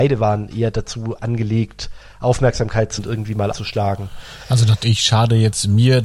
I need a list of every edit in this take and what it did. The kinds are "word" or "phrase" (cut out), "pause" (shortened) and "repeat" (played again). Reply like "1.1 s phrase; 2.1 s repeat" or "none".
1.2 s word; 3.0 s word; 3.5 s word; 4.8 s word